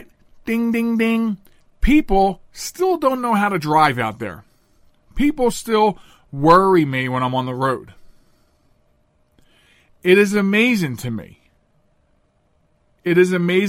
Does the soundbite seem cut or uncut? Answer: uncut